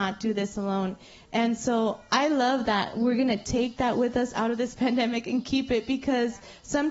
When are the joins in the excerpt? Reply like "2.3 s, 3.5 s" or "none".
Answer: none